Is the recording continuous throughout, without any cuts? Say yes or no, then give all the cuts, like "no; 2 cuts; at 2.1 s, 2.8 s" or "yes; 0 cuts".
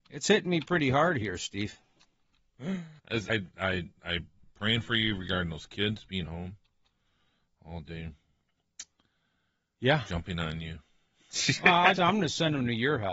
no; 3 cuts; at 3.0 s, 3.3 s, 12.0 s